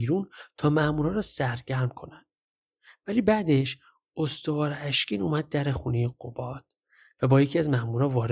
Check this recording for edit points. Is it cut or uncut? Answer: uncut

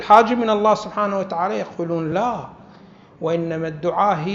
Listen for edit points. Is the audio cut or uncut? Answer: uncut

